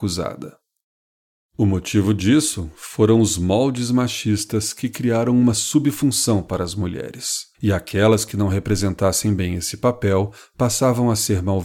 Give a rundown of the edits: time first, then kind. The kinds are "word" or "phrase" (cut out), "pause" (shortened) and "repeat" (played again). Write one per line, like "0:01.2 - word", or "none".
0:07.5 - pause